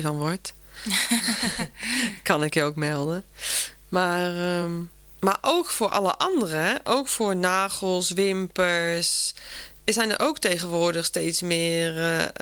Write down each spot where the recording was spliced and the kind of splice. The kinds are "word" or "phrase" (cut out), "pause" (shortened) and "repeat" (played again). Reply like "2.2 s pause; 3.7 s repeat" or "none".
none